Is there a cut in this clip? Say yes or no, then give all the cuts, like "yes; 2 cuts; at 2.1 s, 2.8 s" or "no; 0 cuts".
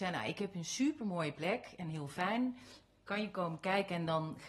no; 0 cuts